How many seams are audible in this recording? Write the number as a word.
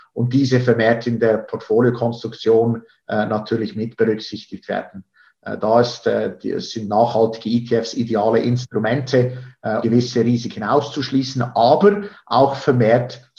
one